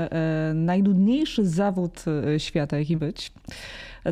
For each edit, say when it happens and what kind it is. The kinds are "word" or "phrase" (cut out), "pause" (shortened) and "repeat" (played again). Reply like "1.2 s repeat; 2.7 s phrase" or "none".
3.0 s word